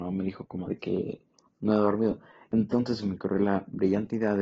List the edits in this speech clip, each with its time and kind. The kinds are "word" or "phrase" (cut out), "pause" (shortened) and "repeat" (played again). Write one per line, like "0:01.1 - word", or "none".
none